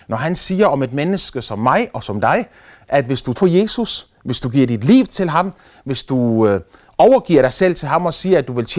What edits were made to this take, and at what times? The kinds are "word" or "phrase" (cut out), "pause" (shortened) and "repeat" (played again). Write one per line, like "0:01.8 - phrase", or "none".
0:03.4 - word